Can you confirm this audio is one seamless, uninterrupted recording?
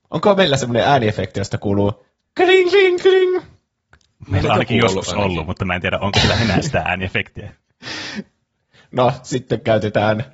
yes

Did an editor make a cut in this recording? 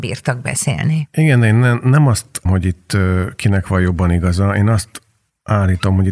yes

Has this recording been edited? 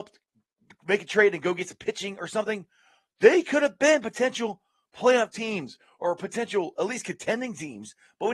no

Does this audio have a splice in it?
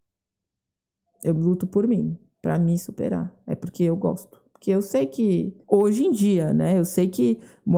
yes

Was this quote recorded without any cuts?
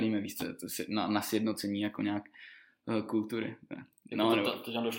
yes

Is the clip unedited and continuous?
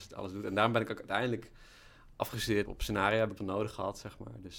no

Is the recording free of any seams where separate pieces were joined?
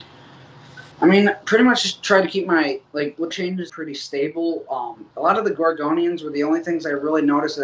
no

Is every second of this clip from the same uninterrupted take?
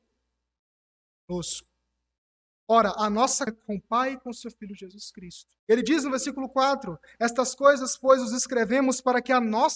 no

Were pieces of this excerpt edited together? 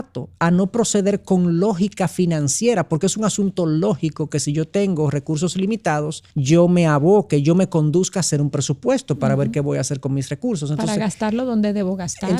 yes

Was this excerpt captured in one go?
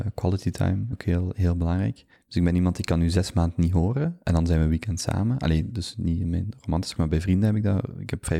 no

